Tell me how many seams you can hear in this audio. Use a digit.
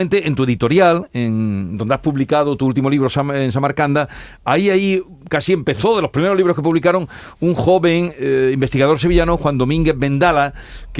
0